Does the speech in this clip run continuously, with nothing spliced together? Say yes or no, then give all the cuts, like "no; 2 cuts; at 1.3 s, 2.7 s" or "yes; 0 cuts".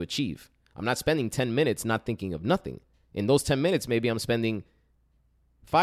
yes; 0 cuts